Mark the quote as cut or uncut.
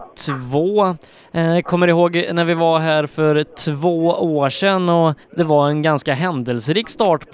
cut